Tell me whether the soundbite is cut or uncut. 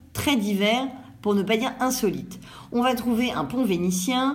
uncut